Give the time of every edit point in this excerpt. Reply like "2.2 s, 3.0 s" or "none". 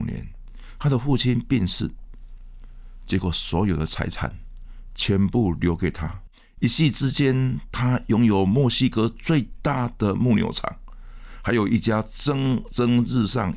6.3 s

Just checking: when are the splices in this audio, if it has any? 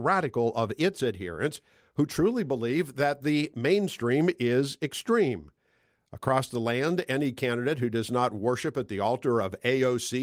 none

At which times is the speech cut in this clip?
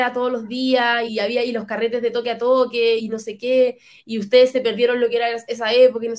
1.1 s, 3.0 s

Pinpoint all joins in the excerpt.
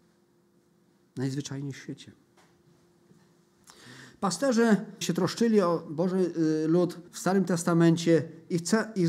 5.0 s, 7.1 s

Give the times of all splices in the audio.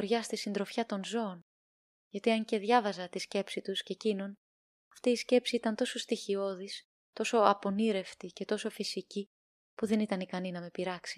none

